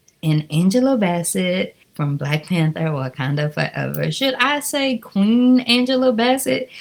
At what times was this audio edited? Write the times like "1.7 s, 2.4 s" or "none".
1.8 s